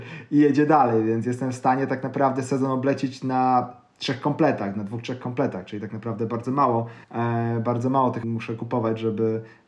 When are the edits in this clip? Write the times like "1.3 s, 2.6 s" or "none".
7.0 s, 8.2 s